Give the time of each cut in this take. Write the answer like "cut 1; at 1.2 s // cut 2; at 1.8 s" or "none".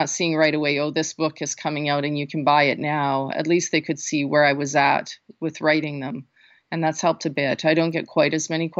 none